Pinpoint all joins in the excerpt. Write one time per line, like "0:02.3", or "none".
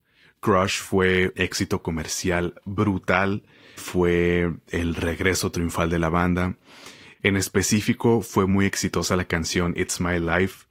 0:01.3
0:03.8